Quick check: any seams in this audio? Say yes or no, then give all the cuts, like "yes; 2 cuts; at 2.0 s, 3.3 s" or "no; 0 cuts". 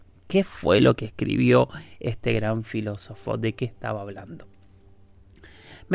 no; 0 cuts